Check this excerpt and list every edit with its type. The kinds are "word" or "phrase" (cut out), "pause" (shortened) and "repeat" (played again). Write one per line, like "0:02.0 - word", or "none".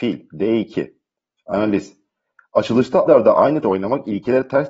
0:03.1 - word
0:03.6 - word